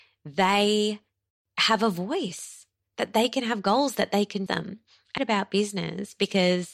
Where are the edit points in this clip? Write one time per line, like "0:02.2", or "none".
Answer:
0:04.5
0:05.2

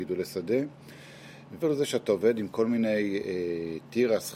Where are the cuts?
0:01.6

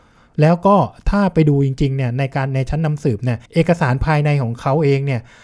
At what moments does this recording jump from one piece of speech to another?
0:03.5

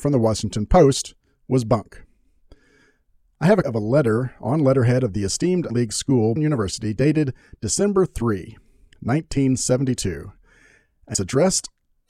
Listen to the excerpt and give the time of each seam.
0:03.6
0:05.7
0:06.4
0:11.1

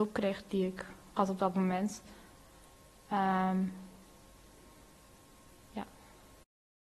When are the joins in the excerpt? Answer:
0:01.2

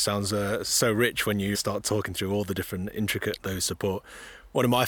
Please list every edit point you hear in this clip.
0:01.5
0:03.4

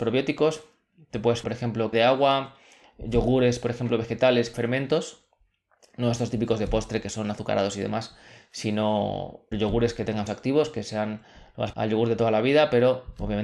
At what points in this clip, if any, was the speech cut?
0:01.4
0:01.9
0:04.5
0:09.5
0:10.3
0:11.7

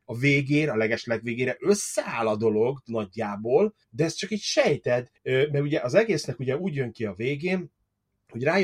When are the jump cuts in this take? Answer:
0:03.8
0:05.2

